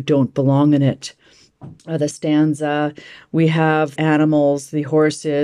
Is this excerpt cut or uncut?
cut